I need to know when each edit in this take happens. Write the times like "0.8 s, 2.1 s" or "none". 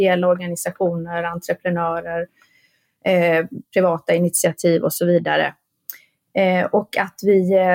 none